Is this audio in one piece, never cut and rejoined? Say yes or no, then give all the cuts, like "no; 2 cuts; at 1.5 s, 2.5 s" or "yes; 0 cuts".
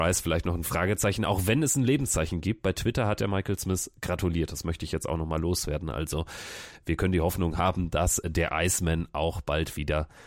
yes; 0 cuts